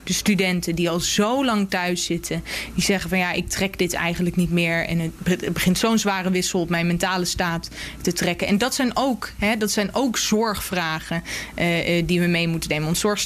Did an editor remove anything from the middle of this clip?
no; 0 cuts

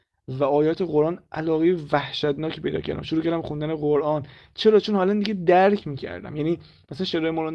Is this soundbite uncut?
yes; 0 cuts

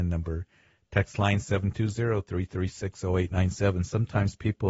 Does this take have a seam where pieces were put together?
no; 0 cuts

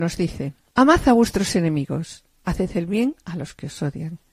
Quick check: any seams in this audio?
no; 0 cuts

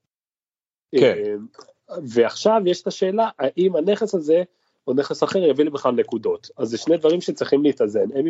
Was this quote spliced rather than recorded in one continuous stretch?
no; 0 cuts

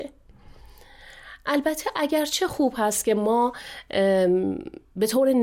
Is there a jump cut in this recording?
no; 0 cuts

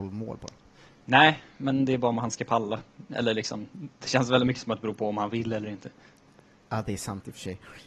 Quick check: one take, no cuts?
yes; 0 cuts

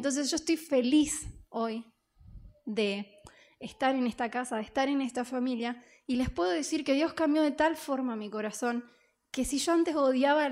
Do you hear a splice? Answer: no; 0 cuts

